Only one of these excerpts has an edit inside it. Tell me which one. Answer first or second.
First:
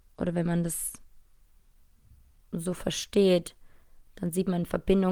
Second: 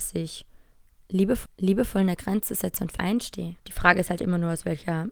second